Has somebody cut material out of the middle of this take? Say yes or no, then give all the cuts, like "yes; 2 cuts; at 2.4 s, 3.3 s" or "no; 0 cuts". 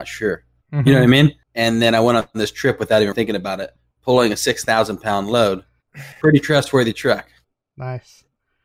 yes; 3 cuts; at 1.4 s, 3.1 s, 6.1 s